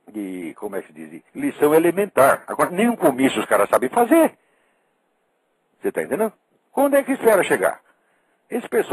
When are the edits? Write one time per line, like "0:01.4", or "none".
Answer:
0:01.3

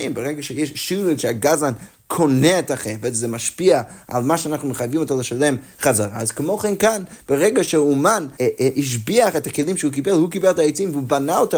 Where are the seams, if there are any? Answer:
0:01.2
0:08.3

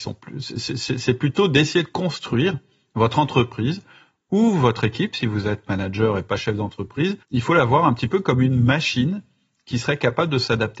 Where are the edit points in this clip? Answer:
0:07.2

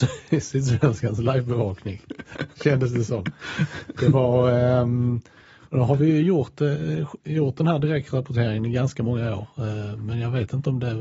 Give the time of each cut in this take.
none

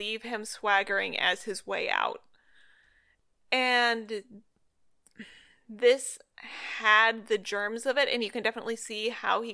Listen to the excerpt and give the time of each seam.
none

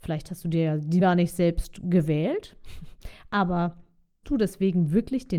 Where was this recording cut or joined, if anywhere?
0:01.0
0:04.2

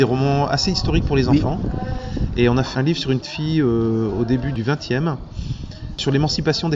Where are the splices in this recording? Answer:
0:02.7
0:03.2

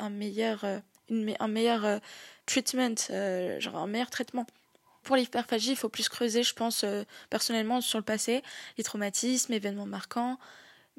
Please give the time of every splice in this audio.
0:02.4
0:05.0

